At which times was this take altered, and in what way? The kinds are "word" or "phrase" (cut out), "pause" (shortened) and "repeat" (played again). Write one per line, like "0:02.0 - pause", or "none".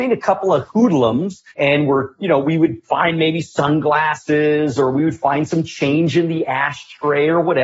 0:01.5 - pause